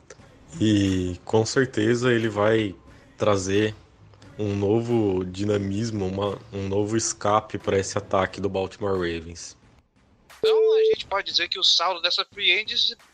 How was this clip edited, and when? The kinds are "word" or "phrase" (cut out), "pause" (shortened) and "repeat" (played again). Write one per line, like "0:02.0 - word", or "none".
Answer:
none